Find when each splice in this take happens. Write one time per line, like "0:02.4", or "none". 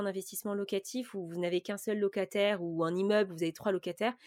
none